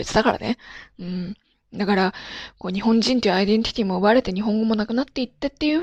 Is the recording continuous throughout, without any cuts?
yes; 0 cuts

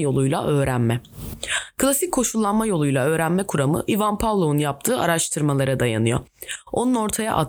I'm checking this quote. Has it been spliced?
no; 0 cuts

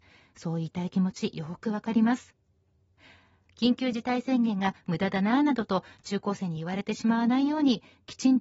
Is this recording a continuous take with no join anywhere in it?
yes; 0 cuts

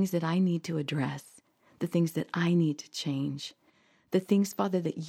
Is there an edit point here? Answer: no; 0 cuts

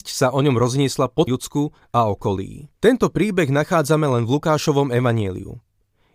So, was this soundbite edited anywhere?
yes; 2 cuts; at 1.3 s, 2.8 s

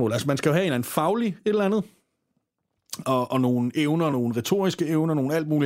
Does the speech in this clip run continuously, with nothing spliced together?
yes; 0 cuts

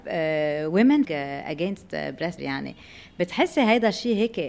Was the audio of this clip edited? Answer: yes; 2 cuts; at 1.0 s, 2.4 s

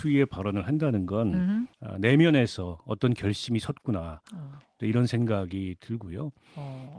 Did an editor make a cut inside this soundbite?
yes; 1 cut; at 1.7 s

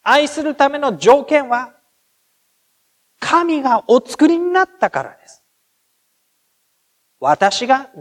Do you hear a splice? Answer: no; 0 cuts

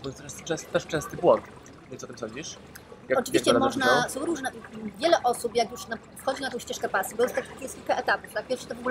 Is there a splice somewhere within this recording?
no; 0 cuts

